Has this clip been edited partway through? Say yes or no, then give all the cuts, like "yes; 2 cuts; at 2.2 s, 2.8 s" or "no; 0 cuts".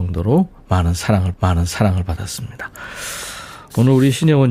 yes; 1 cut; at 1.3 s